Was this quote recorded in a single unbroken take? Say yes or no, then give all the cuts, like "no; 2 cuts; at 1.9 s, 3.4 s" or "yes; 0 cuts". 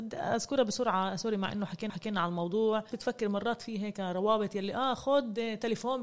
no; 2 cuts; at 1.9 s, 2.9 s